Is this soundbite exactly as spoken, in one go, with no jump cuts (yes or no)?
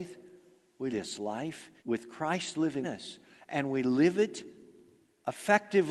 no